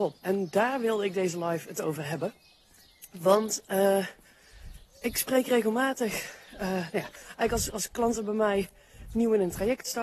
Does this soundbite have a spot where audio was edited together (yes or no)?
no